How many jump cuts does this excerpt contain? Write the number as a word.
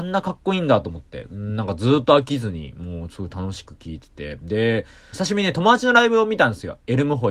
one